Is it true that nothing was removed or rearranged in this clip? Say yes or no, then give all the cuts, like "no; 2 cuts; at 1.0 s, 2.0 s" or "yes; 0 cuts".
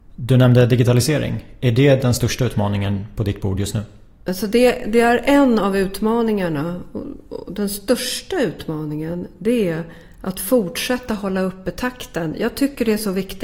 yes; 0 cuts